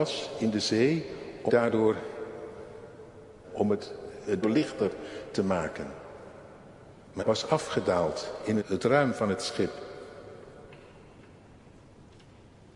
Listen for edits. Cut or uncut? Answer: cut